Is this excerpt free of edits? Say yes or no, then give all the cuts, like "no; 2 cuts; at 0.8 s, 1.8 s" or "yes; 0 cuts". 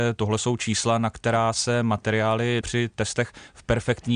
no; 1 cut; at 2.6 s